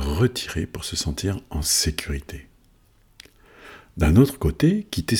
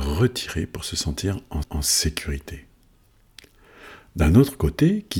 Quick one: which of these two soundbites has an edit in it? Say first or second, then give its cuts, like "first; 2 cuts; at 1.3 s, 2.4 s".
second; 1 cut; at 1.6 s